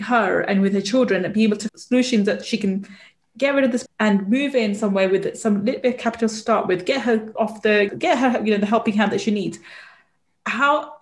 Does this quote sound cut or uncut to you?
cut